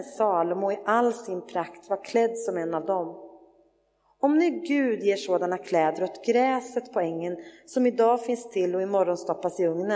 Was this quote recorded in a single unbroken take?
yes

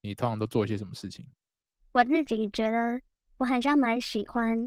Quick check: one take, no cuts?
yes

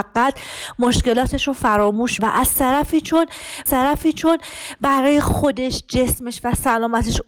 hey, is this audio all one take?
no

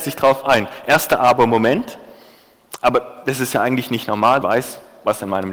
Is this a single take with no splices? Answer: no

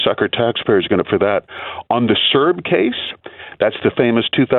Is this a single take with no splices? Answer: no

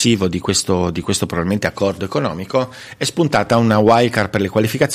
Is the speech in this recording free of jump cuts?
yes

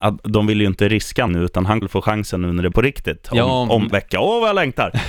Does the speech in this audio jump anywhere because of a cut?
yes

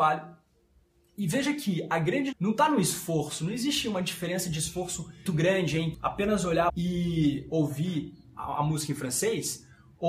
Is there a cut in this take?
yes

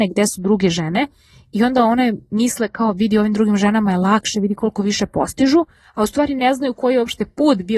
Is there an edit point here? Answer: no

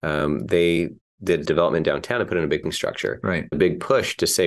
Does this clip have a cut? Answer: yes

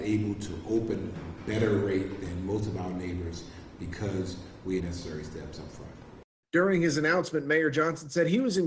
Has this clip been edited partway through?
yes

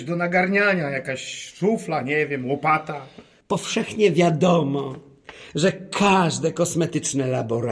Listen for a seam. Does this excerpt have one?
no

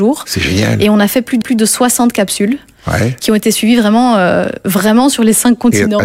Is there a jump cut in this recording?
yes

